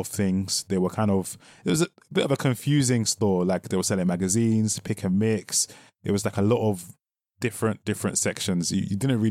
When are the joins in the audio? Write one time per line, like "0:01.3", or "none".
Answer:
none